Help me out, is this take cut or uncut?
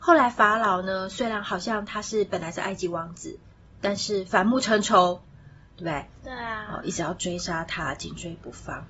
uncut